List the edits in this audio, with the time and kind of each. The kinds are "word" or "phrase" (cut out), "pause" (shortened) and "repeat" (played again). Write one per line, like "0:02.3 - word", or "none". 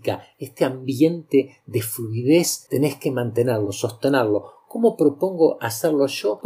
none